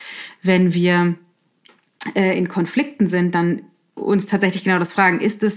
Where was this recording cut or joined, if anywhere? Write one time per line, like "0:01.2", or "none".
none